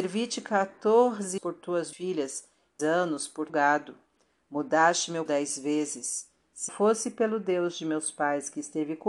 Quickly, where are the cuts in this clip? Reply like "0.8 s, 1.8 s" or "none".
1.4 s, 1.9 s, 2.8 s, 3.5 s, 5.3 s, 6.7 s